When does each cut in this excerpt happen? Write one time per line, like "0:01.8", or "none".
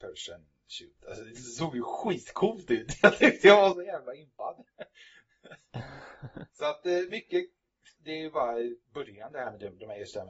0:07.9
0:08.8